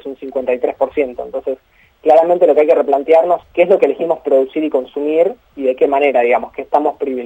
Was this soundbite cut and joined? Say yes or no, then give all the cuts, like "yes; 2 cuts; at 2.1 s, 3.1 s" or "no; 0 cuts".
yes; 1 cut; at 3.4 s